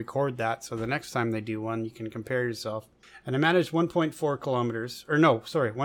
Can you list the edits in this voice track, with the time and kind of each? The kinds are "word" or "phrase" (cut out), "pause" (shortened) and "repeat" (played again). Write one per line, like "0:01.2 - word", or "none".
none